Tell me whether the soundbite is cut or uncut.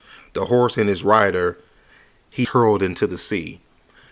cut